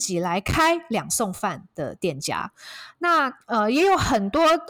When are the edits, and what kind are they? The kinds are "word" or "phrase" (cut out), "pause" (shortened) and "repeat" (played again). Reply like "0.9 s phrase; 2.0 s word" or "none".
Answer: 3.4 s pause